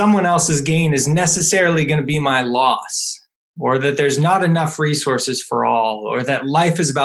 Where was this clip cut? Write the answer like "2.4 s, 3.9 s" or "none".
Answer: none